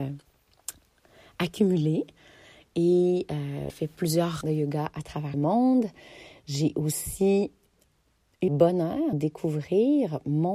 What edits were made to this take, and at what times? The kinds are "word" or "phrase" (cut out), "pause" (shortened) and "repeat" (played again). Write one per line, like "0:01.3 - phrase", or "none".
0:03.7 - word
0:04.4 - word
0:05.3 - word
0:08.5 - word
0:09.1 - word